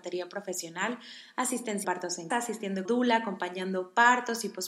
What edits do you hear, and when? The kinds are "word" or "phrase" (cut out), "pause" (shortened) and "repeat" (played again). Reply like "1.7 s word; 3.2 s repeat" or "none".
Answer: 1.8 s word; 2.3 s word; 2.9 s word

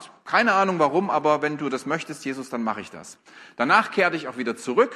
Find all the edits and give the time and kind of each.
none

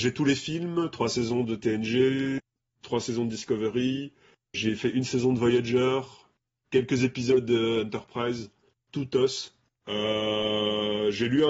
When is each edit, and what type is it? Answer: 4.5 s word

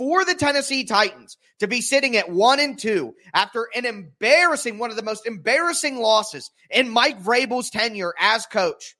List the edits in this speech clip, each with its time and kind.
none

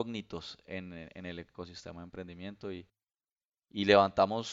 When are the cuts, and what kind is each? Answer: none

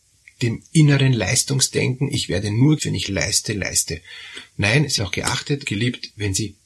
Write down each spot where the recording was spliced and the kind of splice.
2.8 s word; 3.1 s word; 5.0 s word; 5.6 s word

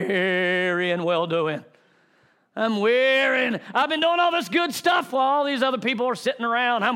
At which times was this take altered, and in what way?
none

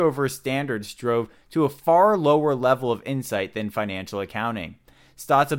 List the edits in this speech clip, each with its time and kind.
none

